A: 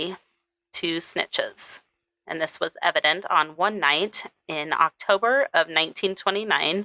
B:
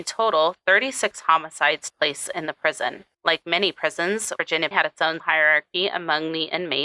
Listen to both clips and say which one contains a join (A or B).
B